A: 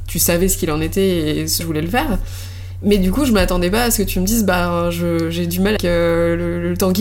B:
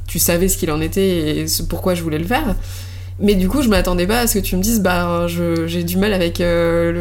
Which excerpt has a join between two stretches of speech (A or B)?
A